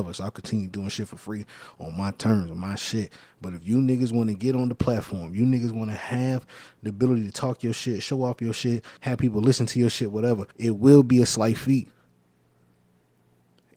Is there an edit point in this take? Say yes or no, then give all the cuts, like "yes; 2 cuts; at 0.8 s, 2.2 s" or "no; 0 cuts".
yes; 2 cuts; at 9.0 s, 10.5 s